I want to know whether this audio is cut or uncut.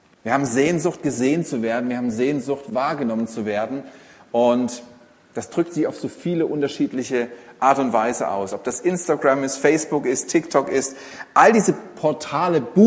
uncut